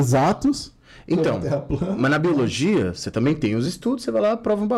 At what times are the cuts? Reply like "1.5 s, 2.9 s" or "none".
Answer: none